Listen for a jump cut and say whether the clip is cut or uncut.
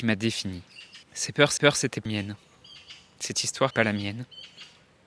cut